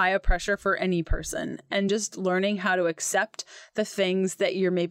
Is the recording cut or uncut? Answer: uncut